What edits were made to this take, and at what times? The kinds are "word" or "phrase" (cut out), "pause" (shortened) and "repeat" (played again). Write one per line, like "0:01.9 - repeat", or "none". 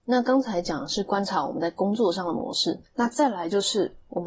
0:02.9 - pause